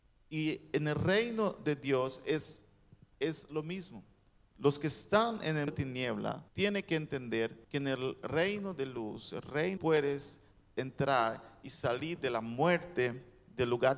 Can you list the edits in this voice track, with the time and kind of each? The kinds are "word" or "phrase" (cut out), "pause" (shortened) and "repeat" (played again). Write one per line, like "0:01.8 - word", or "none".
0:05.7 - word
0:06.5 - pause
0:07.6 - pause
0:09.8 - phrase